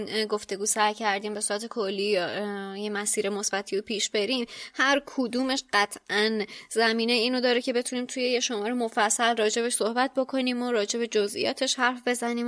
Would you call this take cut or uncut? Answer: uncut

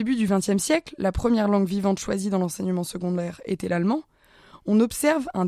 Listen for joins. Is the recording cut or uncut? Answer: uncut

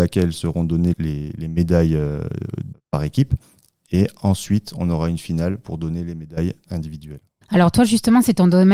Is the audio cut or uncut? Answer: uncut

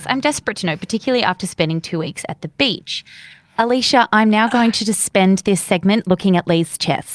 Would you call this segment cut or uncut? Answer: uncut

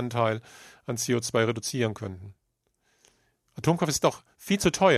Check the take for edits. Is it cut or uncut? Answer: uncut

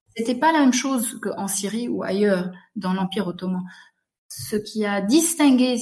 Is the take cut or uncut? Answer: uncut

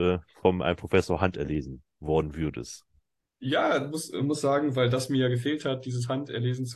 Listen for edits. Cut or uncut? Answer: uncut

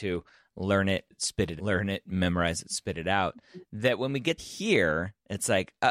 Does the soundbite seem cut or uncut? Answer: cut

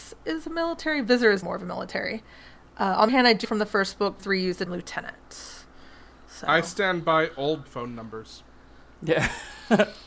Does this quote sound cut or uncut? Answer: cut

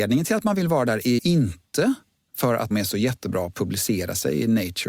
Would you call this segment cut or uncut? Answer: cut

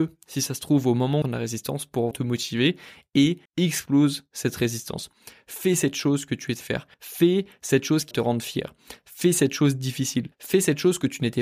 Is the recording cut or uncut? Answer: cut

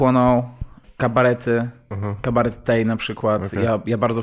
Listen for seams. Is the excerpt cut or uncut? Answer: uncut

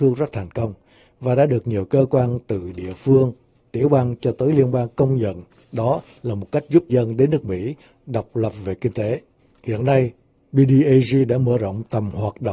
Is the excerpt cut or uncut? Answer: cut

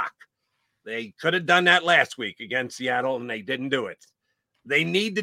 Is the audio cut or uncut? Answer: uncut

